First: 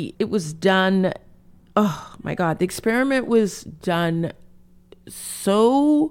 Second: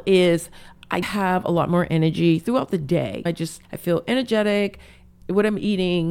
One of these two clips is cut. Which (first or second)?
second